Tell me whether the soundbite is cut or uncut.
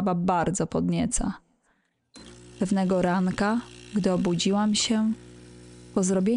uncut